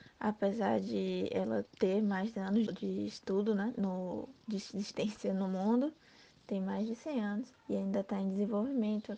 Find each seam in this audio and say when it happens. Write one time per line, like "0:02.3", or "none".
0:01.7
0:02.7
0:07.5